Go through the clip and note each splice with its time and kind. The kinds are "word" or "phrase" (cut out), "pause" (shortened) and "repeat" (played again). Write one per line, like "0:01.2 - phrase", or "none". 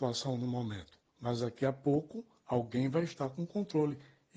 0:01.1 - pause